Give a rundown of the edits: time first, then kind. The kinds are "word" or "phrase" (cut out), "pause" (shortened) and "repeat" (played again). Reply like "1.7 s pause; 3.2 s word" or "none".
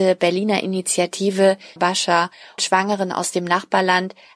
1.8 s word; 2.6 s word